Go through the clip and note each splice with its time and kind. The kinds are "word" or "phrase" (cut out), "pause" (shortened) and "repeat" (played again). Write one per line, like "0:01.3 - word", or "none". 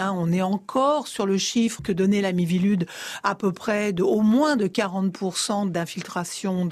0:01.8 - word